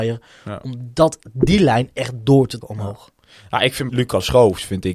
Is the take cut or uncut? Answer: cut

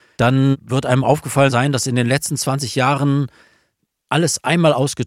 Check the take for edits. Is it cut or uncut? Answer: uncut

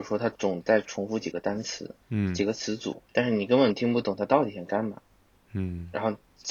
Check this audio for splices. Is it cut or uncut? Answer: cut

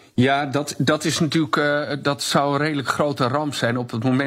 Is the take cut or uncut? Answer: uncut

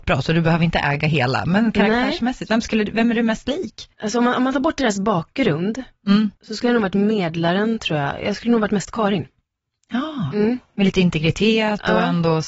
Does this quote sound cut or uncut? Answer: cut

